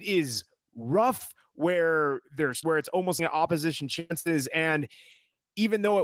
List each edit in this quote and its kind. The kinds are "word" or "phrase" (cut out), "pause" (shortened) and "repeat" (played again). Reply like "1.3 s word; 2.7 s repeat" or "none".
2.6 s word; 3.2 s word